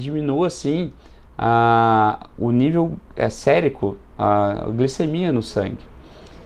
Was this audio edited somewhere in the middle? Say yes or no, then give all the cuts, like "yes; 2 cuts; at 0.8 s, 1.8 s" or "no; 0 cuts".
no; 0 cuts